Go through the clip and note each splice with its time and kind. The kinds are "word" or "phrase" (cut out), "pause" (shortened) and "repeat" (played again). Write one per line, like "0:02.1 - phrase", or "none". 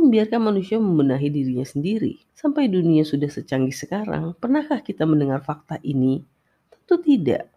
0:02.3 - pause